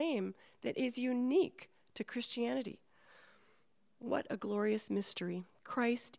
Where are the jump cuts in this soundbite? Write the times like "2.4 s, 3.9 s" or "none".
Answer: none